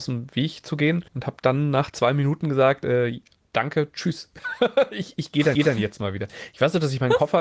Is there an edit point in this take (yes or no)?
yes